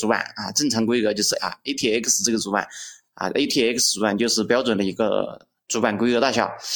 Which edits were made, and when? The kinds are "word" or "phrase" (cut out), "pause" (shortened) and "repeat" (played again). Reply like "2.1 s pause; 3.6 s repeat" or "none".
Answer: 1.4 s word